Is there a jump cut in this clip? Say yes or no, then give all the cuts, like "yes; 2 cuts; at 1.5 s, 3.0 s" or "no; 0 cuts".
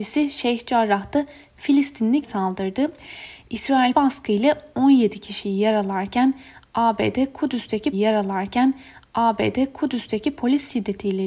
yes; 3 cuts; at 2.2 s, 3.9 s, 7.9 s